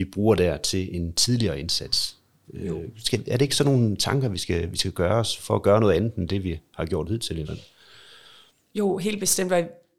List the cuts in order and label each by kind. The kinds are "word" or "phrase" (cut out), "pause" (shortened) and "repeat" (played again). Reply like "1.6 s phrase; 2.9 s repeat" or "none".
5.4 s word; 7.4 s word